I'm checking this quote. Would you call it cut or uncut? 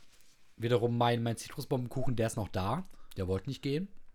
uncut